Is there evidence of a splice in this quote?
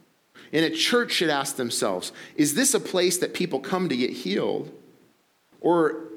no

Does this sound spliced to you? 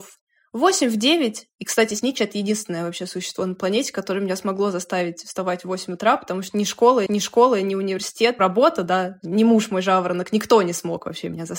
yes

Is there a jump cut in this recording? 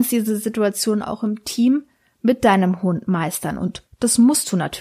no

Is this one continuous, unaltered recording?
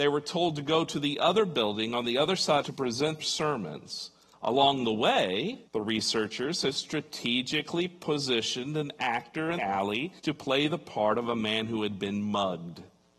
no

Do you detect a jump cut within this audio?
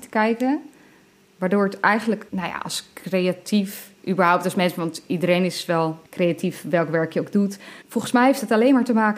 yes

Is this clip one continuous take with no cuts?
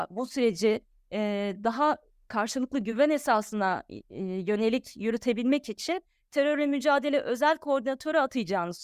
yes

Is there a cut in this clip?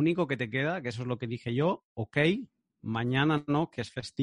no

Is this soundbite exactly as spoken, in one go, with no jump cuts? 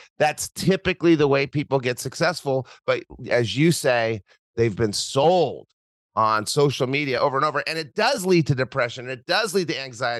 yes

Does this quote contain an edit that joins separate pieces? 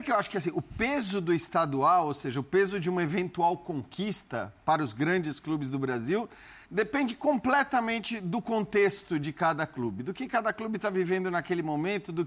yes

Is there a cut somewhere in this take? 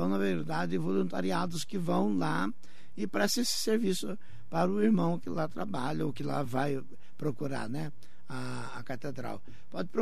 no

